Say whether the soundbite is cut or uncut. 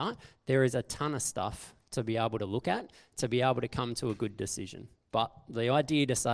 uncut